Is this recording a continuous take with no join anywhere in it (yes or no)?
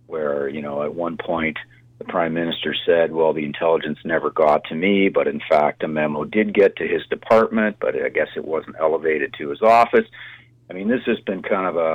yes